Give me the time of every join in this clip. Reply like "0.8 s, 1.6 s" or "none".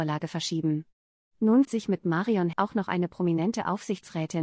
1.6 s, 2.5 s